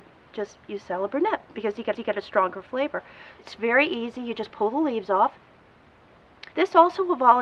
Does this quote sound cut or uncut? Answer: cut